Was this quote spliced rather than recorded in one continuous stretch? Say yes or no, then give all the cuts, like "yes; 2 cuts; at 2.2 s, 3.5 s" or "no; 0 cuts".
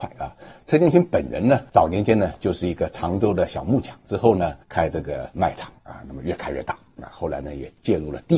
yes; 1 cut; at 4.6 s